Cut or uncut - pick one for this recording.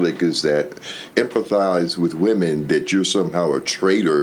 cut